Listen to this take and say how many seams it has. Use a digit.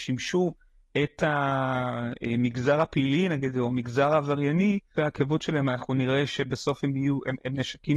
1